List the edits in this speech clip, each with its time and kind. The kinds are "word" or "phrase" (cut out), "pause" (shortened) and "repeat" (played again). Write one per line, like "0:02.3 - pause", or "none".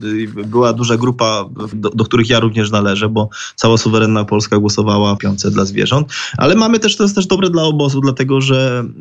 0:01.7 - word
0:05.2 - phrase